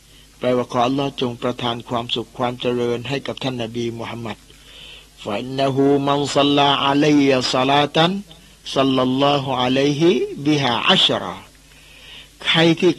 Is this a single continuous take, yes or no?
yes